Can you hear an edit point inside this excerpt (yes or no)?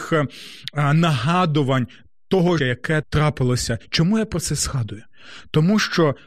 yes